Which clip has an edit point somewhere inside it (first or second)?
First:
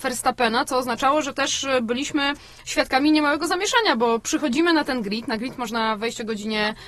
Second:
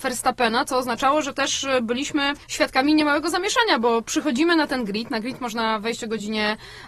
second